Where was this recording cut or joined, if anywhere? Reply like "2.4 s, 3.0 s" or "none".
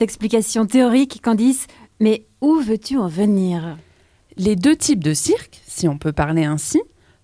none